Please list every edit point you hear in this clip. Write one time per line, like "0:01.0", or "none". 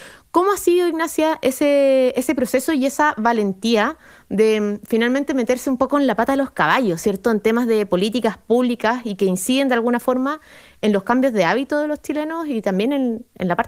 none